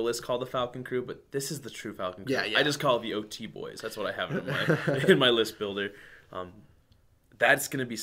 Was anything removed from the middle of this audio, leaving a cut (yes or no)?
no